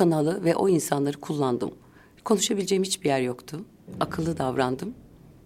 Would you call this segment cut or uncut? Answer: uncut